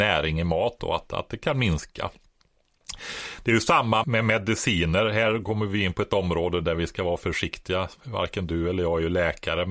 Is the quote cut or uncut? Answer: cut